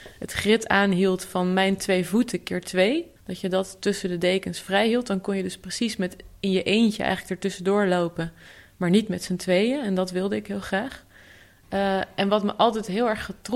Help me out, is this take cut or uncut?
cut